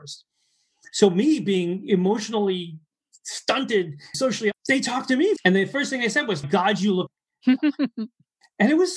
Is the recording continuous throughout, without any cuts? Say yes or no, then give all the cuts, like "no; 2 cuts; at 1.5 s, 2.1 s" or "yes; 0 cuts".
no; 5 cuts; at 4.1 s, 4.5 s, 5.4 s, 6.4 s, 7.1 s